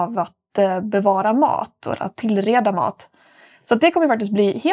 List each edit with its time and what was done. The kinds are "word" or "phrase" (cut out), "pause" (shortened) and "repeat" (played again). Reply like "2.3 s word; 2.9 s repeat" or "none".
none